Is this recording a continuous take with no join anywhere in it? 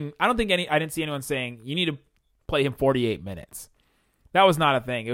yes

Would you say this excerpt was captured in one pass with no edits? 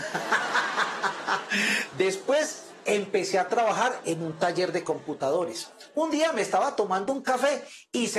yes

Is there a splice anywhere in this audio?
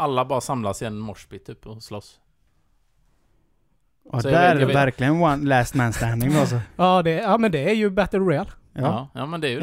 no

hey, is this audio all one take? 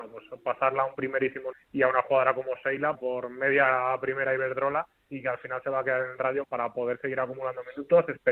no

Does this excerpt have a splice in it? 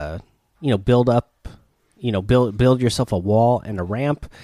no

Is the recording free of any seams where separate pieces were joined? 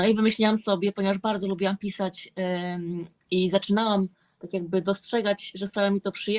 yes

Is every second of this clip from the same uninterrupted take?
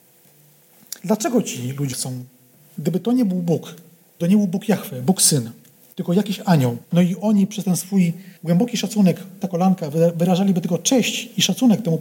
no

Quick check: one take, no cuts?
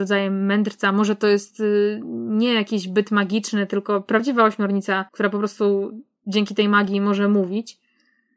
no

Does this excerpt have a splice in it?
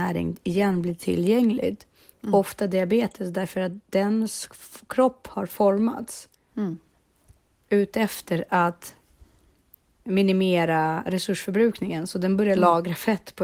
no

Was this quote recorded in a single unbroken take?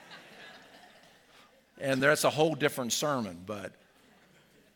yes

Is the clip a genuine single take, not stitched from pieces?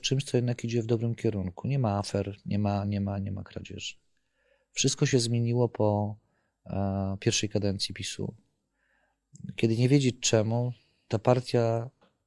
yes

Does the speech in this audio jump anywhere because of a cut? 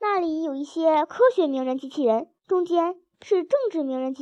yes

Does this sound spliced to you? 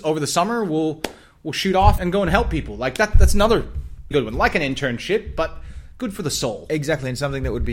yes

